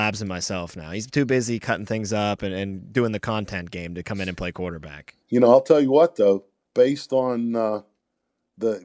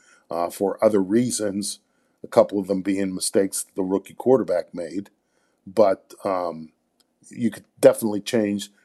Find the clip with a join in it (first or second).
first